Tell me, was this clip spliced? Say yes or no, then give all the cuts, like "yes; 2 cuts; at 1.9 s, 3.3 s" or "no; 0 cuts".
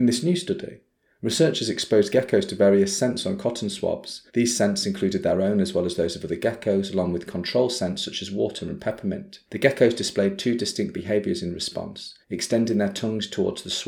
yes; 3 cuts; at 4.3 s, 9.5 s, 12.2 s